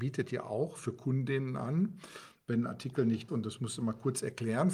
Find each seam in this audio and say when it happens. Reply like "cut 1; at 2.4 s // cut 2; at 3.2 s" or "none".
cut 1; at 3.3 s